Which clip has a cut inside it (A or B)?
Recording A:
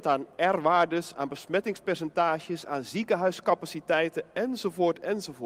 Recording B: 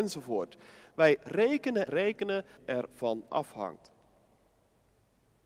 B